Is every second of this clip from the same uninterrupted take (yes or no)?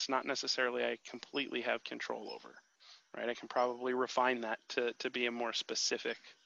yes